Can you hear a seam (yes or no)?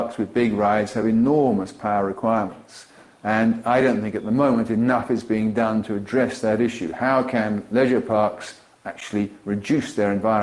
no